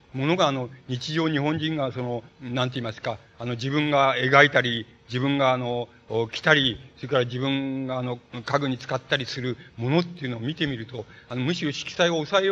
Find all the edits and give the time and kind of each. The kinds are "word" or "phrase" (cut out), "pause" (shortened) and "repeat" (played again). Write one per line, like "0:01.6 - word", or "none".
0:02.3 - pause

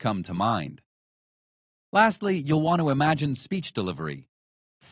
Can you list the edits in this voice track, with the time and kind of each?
none

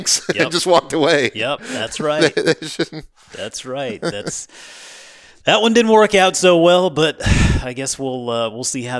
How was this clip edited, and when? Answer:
none

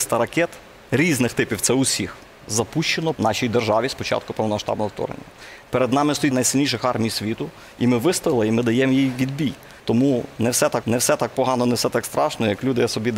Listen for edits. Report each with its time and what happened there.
0:03.1 - word
0:06.3 - phrase
0:09.8 - pause
0:10.8 - repeat

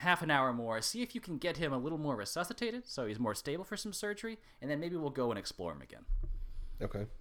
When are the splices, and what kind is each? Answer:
none

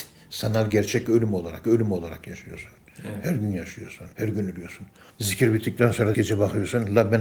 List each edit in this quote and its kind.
0:01.6 - repeat
0:04.1 - pause
0:05.1 - pause
0:06.1 - word

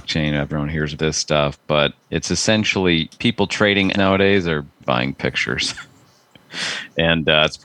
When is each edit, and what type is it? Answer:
0:01.0 - word
0:02.0 - pause
0:03.1 - pause
0:03.9 - word
0:04.8 - word

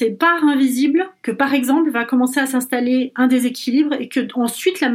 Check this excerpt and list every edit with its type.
none

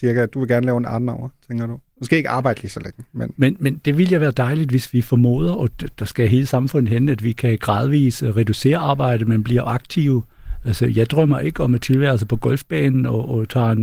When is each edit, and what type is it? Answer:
none

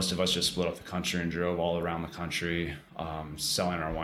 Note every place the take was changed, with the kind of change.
0:02.9 - pause

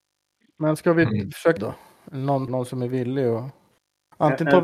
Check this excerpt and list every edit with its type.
0:01.6 - phrase
0:02.5 - phrase

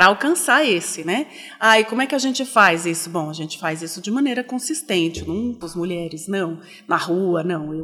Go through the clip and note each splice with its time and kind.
0:05.6 - word

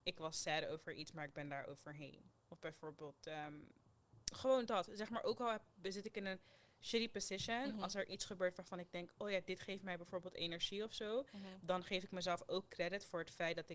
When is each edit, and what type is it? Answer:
0:04.2 - pause

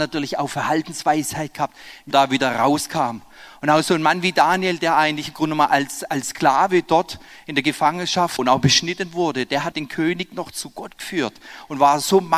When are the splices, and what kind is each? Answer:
0:02.1 - word
0:08.4 - word
0:09.7 - phrase

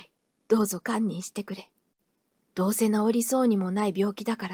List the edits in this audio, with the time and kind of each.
none

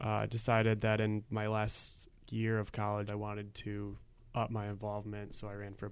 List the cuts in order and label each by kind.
0:03.1 - word

